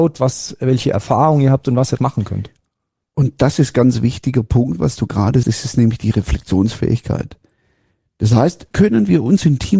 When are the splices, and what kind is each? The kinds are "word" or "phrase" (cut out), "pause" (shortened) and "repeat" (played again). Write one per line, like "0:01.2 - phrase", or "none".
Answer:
0:02.0 - word
0:05.4 - word
0:08.7 - word